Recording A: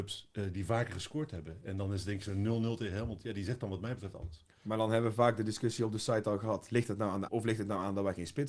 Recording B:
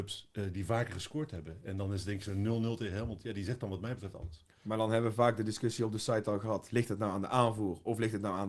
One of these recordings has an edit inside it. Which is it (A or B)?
A